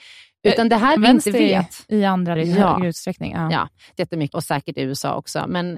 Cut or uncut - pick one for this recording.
cut